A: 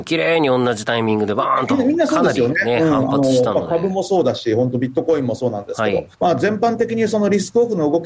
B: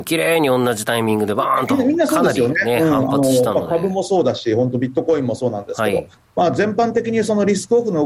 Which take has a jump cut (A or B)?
A